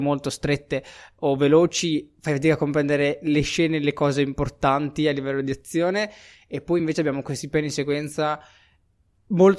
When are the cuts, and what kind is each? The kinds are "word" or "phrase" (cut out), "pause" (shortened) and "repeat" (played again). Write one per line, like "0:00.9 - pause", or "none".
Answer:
none